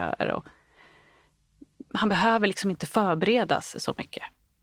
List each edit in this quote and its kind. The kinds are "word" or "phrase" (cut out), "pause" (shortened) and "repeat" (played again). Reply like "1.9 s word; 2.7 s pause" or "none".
none

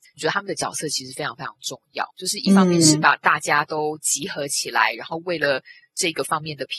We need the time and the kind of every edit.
2.1 s pause

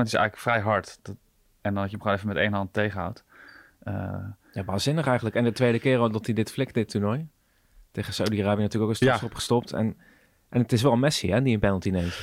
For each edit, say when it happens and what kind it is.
none

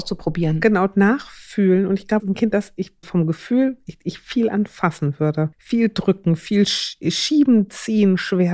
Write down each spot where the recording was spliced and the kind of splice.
2.2 s word; 3.0 s word; 5.5 s pause

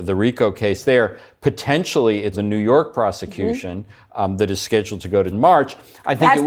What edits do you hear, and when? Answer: 2.3 s word; 5.3 s word

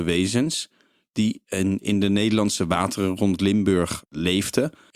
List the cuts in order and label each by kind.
none

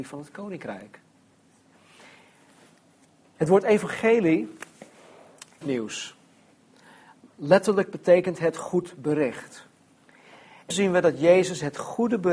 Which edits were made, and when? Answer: 5.6 s phrase; 10.7 s word

